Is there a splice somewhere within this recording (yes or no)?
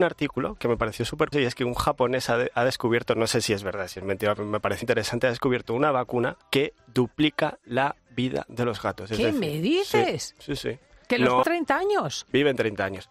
yes